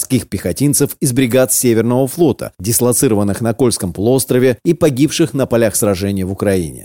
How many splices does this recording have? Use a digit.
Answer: 0